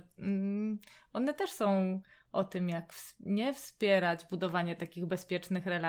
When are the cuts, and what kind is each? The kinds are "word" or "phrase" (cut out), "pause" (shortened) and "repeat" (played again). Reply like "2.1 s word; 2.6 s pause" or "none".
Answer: none